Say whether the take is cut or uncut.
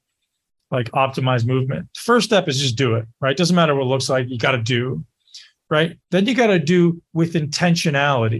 cut